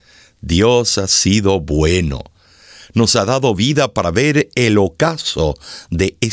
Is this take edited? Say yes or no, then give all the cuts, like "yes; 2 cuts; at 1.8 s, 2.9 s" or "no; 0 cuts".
no; 0 cuts